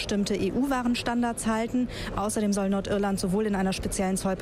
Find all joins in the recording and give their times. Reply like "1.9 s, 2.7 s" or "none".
none